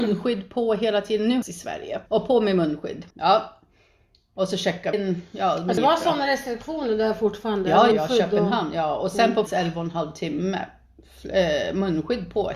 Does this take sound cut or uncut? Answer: cut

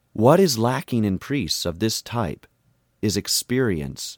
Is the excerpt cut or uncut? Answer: uncut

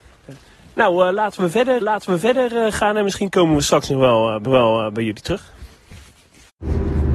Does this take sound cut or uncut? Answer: cut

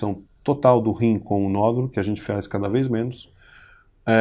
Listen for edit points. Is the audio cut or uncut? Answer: uncut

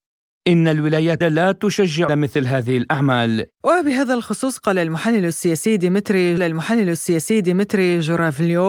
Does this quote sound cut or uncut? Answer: cut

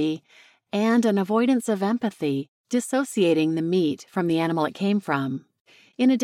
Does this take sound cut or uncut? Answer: uncut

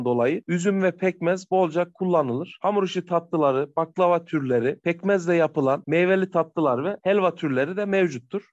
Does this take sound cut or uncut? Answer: uncut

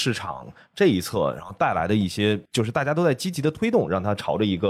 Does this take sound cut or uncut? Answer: cut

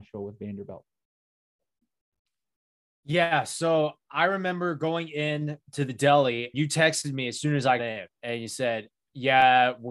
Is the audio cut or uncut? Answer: cut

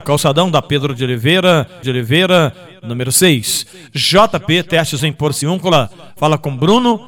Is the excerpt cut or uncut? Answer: cut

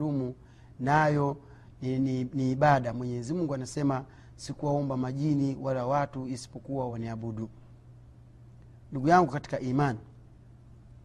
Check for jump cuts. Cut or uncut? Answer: uncut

